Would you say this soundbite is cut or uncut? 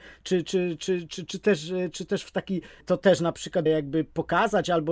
cut